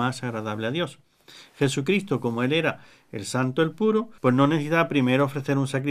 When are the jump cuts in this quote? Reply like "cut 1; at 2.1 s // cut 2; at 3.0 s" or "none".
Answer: cut 1; at 4.2 s